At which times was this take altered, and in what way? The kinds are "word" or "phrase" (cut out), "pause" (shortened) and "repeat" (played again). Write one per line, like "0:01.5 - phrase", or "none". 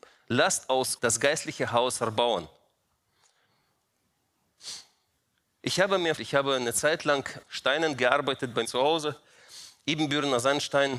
0:01.0 - word
0:06.2 - word
0:07.4 - word
0:08.6 - word